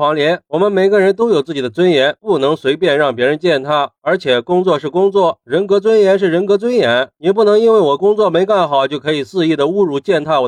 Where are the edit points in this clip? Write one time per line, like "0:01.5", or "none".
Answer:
none